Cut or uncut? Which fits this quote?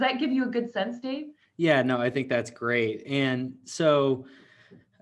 uncut